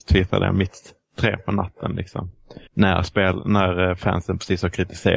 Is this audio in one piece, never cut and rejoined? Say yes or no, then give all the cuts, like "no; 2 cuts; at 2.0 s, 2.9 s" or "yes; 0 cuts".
no; 1 cut; at 2.7 s